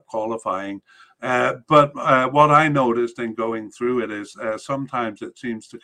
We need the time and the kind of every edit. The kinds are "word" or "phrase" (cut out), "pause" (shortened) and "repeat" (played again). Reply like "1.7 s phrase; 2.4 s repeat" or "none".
none